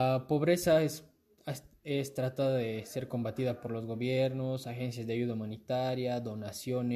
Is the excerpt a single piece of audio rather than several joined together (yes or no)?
yes